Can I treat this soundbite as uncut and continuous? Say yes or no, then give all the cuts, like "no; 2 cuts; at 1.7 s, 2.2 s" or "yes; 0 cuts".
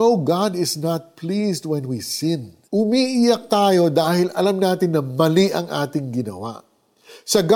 no; 1 cut; at 2.6 s